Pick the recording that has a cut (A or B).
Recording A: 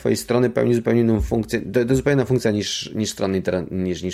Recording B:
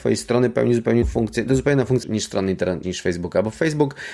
B